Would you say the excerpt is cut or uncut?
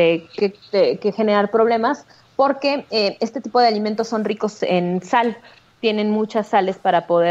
uncut